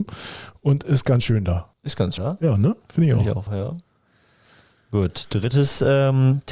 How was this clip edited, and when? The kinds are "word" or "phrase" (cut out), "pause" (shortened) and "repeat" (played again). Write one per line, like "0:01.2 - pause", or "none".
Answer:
0:01.7 - pause
0:02.2 - word
0:03.5 - phrase